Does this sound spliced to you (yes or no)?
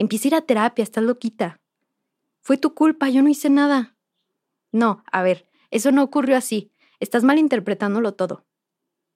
no